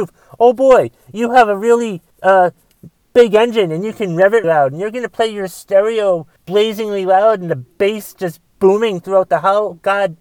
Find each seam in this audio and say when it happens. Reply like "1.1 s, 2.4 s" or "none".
2.1 s, 4.4 s, 6.4 s